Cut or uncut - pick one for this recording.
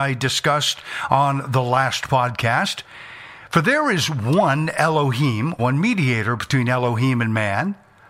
cut